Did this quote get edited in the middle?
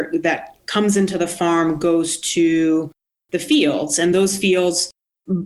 no; 0 cuts

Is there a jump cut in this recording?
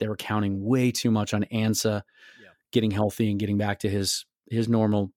no; 0 cuts

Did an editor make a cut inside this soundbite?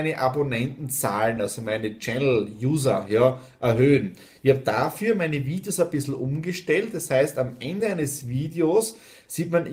no; 0 cuts

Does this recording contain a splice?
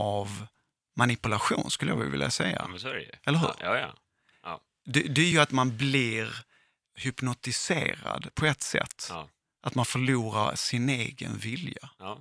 no; 0 cuts

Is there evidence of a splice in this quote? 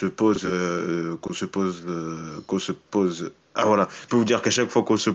yes; 1 cut; at 4.1 s

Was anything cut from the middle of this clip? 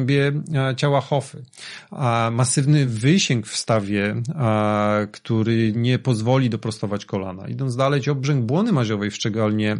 no; 0 cuts

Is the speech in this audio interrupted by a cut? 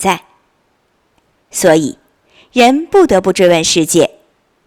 no; 0 cuts

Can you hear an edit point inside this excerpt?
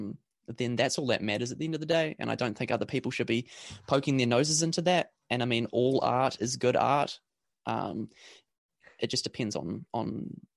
no; 0 cuts

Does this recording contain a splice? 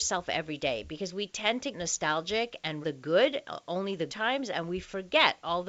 yes; 3 cuts; at 1.7 s, 2.8 s, 4.1 s

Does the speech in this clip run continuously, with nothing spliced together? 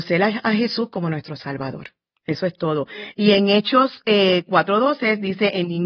yes; 0 cuts

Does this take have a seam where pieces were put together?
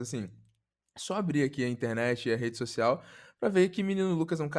no; 0 cuts

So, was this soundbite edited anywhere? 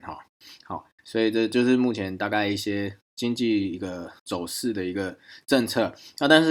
yes; 1 cut; at 4.2 s

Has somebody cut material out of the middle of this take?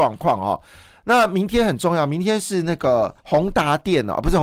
yes; 1 cut; at 3.2 s

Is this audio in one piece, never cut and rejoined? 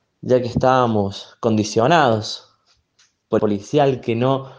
no; 1 cut; at 3.4 s

